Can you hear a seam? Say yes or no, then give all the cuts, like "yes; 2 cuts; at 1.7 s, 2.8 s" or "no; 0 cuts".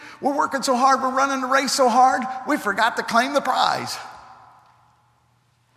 no; 0 cuts